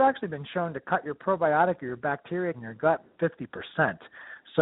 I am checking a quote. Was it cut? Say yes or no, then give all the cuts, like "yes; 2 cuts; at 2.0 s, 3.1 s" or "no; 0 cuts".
yes; 2 cuts; at 2.5 s, 3.2 s